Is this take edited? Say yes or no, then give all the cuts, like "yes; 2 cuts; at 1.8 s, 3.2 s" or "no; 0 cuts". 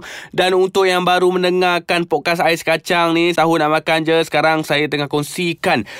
yes; 1 cut; at 3.4 s